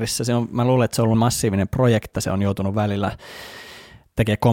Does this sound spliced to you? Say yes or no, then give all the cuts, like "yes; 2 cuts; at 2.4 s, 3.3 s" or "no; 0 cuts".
yes; 2 cuts; at 1.1 s, 2.1 s